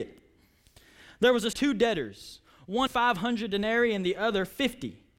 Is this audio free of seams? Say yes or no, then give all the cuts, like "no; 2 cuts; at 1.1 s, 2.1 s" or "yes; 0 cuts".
no; 2 cuts; at 1.5 s, 2.9 s